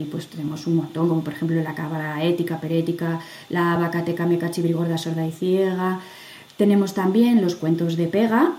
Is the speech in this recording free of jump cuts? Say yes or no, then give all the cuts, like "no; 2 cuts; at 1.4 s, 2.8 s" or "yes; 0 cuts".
yes; 0 cuts